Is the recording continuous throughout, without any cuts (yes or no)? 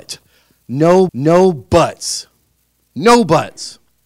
no